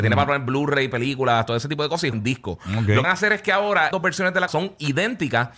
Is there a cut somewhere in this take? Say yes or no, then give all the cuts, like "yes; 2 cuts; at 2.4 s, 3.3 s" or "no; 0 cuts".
yes; 4 cuts; at 2.1 s, 3.0 s, 3.9 s, 4.5 s